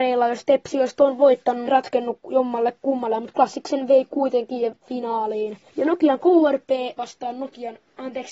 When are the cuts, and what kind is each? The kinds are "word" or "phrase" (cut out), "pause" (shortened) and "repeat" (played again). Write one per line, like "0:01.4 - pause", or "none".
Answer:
0:01.7 - phrase
0:04.8 - phrase
0:05.7 - pause